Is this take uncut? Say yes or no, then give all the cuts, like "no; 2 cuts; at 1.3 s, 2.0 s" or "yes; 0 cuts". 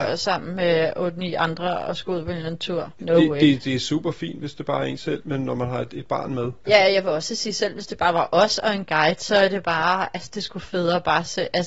yes; 0 cuts